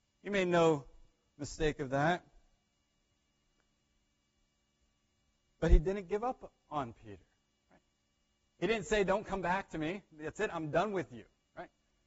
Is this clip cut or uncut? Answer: uncut